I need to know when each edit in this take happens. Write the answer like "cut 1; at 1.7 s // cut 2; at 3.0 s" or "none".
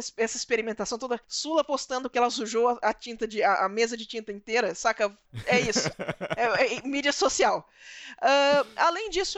cut 1; at 1.2 s